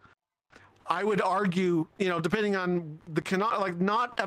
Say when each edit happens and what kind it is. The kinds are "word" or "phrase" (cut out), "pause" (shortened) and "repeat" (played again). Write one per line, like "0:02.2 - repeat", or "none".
none